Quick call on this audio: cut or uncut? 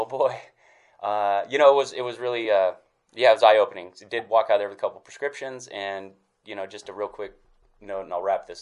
uncut